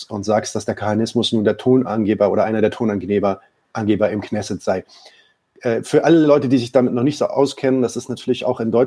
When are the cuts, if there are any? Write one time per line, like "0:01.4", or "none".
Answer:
none